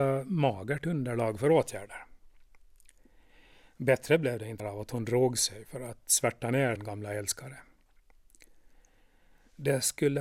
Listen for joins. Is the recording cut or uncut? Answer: cut